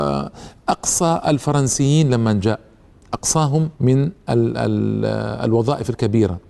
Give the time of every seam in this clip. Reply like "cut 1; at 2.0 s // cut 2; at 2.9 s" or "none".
cut 1; at 3.7 s